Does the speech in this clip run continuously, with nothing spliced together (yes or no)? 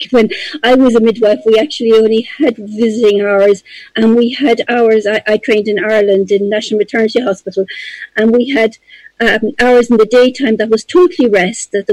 yes